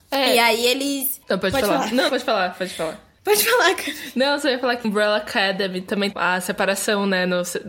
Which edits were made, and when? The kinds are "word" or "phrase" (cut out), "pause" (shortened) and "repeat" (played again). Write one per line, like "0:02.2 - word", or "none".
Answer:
0:01.2 - pause
0:02.1 - word
0:03.2 - pause
0:04.8 - word
0:06.1 - word